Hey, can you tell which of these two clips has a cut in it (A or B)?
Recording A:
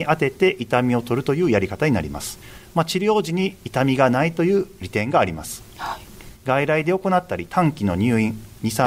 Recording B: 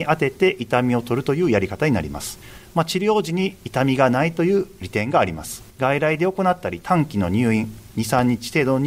B